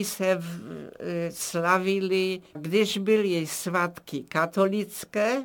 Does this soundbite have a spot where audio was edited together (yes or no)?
yes